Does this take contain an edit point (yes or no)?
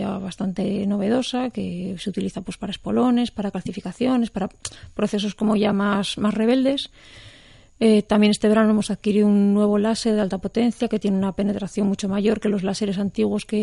no